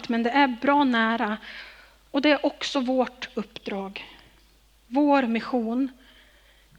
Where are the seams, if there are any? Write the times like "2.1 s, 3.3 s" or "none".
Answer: none